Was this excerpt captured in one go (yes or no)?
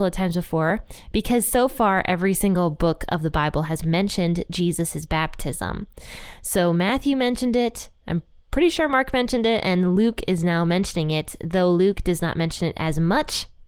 yes